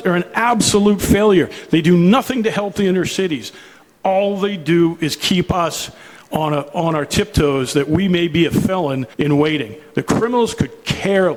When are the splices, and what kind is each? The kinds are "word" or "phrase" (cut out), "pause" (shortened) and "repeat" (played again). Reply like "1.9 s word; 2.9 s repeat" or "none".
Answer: 9.1 s pause